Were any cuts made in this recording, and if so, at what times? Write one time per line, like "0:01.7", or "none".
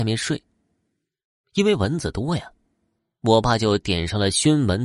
none